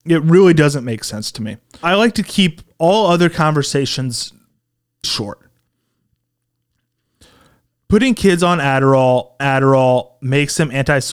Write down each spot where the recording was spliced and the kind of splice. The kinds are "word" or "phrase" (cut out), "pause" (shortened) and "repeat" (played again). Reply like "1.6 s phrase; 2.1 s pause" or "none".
1.8 s word; 5.0 s word; 9.4 s repeat